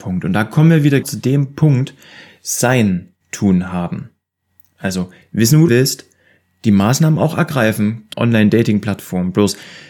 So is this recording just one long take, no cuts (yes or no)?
no